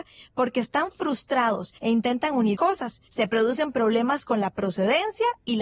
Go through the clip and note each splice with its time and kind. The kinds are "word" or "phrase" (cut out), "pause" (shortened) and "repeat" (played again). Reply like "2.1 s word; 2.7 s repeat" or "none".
1.8 s pause; 2.6 s word; 3.1 s pause